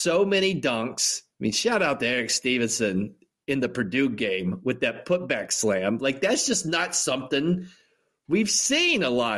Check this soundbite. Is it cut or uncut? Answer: uncut